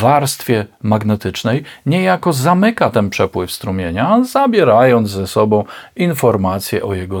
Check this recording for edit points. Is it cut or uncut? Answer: uncut